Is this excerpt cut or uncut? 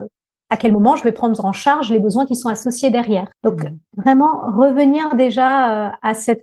cut